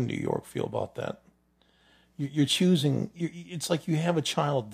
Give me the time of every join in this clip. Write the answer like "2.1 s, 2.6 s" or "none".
none